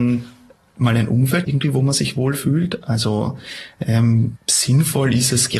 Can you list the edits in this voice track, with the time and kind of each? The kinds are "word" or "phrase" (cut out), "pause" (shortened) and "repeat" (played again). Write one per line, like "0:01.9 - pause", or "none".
0:01.4 - word
0:04.4 - word